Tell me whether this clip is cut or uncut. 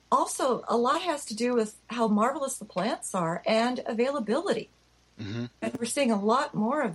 uncut